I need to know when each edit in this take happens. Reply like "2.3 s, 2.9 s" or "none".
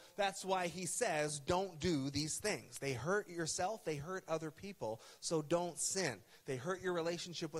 none